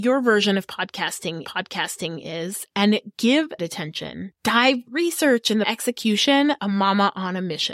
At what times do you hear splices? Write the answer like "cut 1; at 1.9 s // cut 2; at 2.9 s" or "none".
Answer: cut 1; at 1.4 s // cut 2; at 3.6 s // cut 3; at 4.9 s // cut 4; at 5.6 s // cut 5; at 6.6 s